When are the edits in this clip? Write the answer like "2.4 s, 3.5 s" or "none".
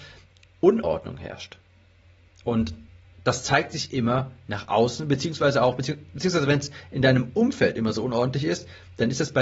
none